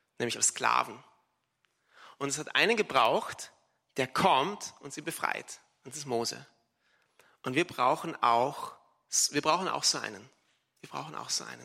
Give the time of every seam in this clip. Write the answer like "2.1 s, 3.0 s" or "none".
none